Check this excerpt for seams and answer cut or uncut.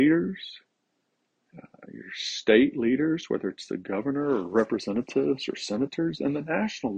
uncut